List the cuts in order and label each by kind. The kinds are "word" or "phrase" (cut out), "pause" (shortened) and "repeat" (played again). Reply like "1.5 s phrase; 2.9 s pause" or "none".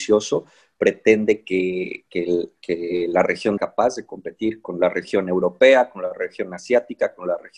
3.6 s phrase